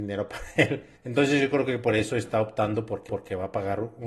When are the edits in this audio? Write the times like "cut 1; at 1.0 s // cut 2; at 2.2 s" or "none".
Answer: cut 1; at 1.0 s // cut 2; at 3.1 s

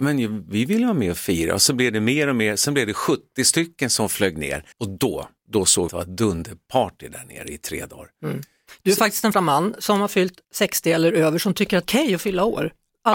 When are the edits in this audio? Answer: cut 1; at 4.7 s // cut 2; at 5.4 s // cut 3; at 5.9 s // cut 4; at 9.3 s // cut 5; at 10.4 s // cut 6; at 11.8 s

